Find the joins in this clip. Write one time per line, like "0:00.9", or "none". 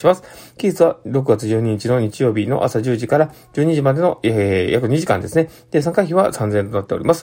none